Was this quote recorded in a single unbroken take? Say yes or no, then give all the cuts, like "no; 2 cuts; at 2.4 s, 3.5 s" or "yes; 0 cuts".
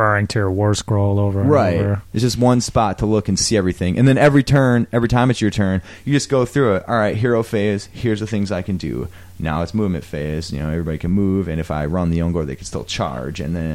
yes; 0 cuts